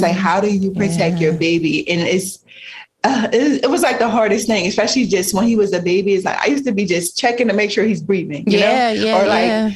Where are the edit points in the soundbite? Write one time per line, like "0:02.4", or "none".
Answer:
none